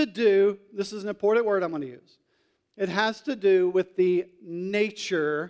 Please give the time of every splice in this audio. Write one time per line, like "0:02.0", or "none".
none